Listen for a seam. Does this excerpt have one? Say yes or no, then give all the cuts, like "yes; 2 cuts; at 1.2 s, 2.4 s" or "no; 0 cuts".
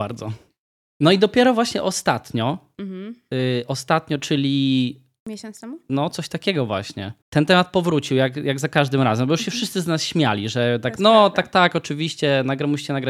yes; 1 cut; at 7.2 s